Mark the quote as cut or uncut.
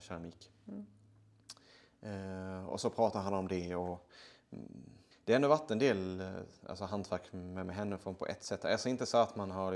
cut